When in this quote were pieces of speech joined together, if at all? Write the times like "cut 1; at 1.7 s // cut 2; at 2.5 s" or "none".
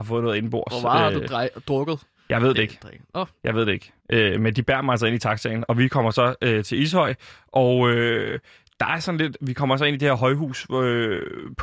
cut 1; at 4.0 s

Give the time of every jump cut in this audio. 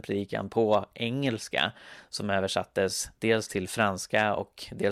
none

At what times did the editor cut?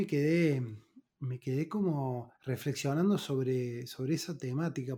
cut 1; at 2.3 s

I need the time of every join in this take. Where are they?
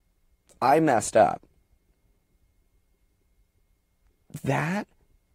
none

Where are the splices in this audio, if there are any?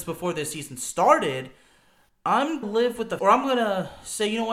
cut 1; at 2.6 s // cut 2; at 3.2 s

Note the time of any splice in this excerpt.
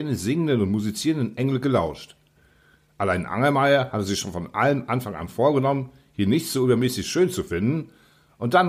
none

